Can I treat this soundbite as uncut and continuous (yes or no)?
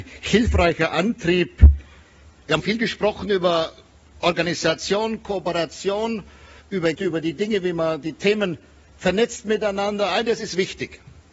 no